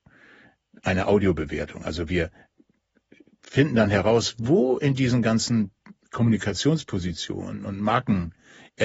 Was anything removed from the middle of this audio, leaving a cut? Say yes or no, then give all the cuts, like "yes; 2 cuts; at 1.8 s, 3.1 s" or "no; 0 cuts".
no; 0 cuts